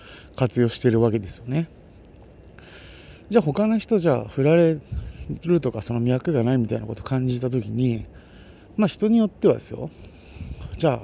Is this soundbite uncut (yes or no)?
yes